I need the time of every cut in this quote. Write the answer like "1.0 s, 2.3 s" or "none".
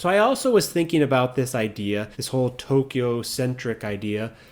2.1 s